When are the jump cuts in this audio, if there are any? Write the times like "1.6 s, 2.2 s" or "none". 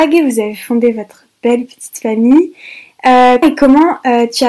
3.4 s